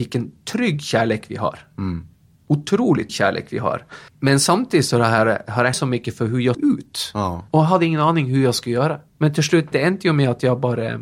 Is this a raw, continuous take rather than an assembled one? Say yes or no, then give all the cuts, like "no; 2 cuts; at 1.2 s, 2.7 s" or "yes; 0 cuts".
no; 7 cuts; at 3.1 s, 4.1 s, 5.7 s, 6.5 s, 7.5 s, 9.1 s, 9.7 s